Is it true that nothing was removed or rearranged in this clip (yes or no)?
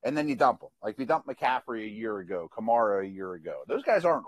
yes